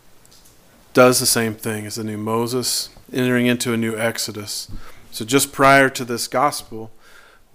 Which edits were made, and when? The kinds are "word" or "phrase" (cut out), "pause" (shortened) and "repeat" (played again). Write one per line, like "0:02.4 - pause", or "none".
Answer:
0:03.0 - pause